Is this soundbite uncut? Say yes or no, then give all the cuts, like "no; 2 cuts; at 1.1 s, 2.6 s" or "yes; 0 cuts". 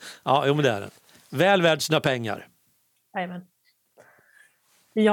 yes; 0 cuts